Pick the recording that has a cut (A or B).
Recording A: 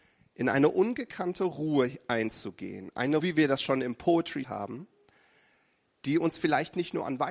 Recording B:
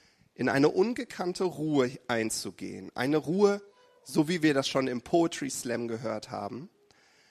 A